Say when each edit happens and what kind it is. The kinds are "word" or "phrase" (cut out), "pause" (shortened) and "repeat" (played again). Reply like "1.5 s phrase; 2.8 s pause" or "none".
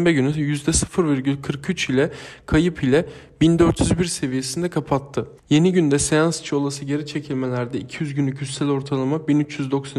5.4 s pause